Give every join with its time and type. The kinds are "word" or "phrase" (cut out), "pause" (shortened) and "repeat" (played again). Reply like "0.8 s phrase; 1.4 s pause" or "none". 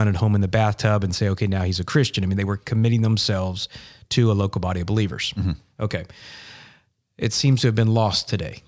none

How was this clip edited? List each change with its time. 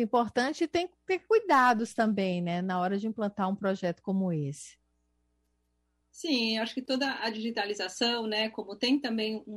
none

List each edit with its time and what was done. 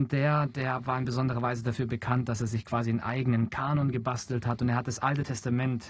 none

